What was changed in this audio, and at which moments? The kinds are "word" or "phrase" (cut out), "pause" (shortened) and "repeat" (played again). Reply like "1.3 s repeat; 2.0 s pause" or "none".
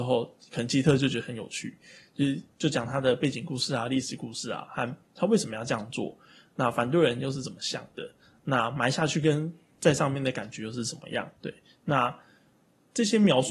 11.4 s pause